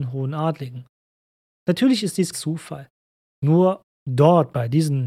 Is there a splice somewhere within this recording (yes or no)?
yes